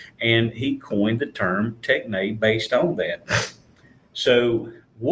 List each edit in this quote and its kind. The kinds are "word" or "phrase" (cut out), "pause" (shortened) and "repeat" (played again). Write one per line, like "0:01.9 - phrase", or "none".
none